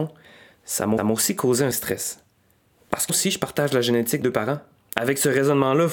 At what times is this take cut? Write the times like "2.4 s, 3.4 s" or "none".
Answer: 1.0 s, 1.7 s, 3.1 s, 4.2 s, 4.8 s